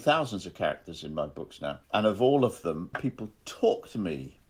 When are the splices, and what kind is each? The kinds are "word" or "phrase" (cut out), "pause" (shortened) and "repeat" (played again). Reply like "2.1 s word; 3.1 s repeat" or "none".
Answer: 1.8 s pause; 2.9 s phrase